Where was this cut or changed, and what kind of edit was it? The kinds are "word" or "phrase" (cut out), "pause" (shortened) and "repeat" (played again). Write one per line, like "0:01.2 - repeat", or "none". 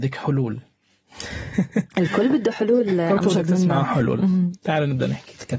0:01.9 - pause